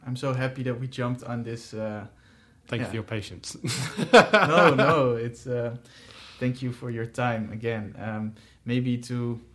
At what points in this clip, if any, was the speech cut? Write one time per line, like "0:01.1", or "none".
none